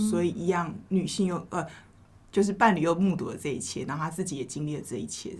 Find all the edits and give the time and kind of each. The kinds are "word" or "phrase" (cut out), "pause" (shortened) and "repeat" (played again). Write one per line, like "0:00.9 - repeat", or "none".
none